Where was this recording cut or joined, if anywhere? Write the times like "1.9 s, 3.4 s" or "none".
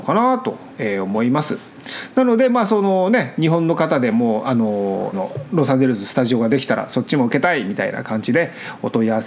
5.1 s